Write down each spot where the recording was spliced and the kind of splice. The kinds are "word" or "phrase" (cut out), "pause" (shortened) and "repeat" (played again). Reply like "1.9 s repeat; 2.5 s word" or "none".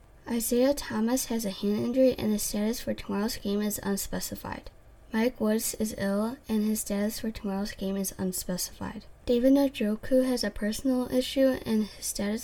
4.8 s pause; 9.2 s pause